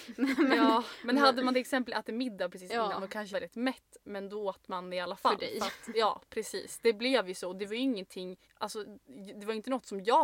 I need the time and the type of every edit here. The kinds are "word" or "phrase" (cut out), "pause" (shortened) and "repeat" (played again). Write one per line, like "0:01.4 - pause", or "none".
0:03.3 - word
0:08.4 - pause

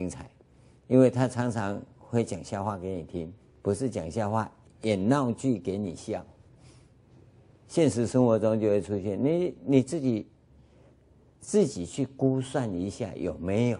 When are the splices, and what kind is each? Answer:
0:03.4 - pause
0:04.6 - phrase

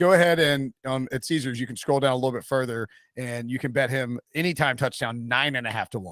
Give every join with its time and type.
none

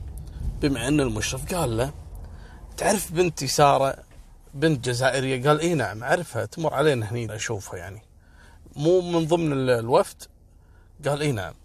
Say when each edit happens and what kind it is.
0:07.3 - word

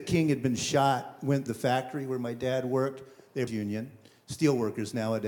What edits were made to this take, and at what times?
0:01.5 - word
0:03.5 - word

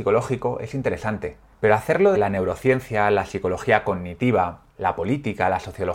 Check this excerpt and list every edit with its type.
0:01.5 - pause
0:02.1 - word
0:04.7 - pause

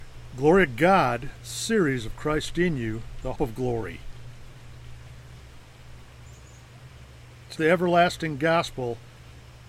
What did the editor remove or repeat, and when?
0:03.4 - word
0:07.6 - word

